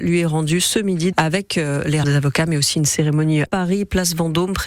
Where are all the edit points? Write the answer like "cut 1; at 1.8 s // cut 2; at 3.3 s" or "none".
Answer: cut 1; at 1.1 s // cut 2; at 2.0 s // cut 3; at 3.5 s